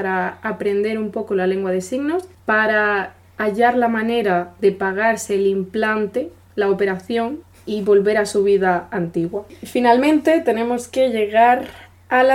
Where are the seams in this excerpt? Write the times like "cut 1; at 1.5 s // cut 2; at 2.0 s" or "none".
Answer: none